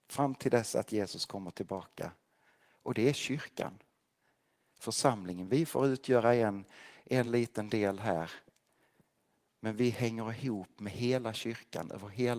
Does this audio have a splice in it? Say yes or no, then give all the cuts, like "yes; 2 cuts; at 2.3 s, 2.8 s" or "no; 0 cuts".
no; 0 cuts